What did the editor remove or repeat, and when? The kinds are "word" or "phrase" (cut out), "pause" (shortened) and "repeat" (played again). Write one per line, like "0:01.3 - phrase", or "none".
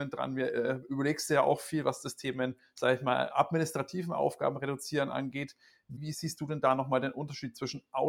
none